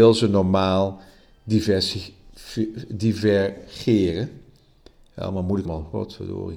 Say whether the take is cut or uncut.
cut